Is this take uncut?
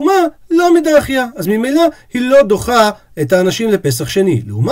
yes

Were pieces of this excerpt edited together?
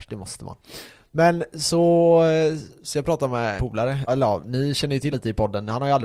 yes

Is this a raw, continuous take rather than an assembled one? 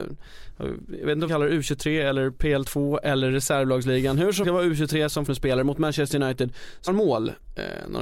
no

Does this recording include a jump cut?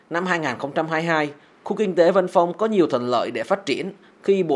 no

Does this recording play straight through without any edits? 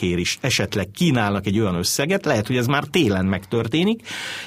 yes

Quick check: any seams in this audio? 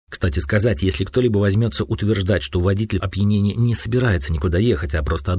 yes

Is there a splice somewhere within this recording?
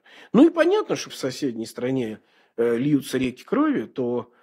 yes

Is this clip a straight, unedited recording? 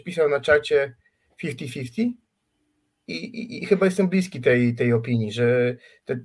yes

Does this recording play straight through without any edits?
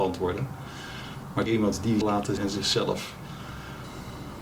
no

